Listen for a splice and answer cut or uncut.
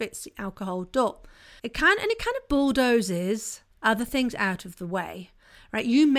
cut